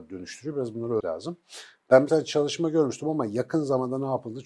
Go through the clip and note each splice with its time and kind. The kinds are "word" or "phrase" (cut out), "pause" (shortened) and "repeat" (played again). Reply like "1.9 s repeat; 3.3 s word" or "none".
1.0 s word; 2.1 s word